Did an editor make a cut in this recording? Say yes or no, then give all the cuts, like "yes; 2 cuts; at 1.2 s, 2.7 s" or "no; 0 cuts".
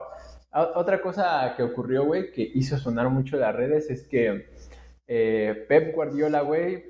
no; 0 cuts